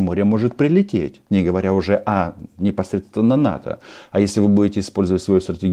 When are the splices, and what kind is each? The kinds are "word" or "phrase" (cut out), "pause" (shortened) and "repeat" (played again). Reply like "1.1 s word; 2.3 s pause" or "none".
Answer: none